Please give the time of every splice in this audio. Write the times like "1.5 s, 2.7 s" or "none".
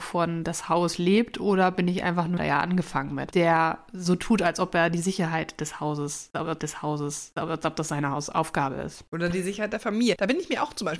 2.4 s, 6.6 s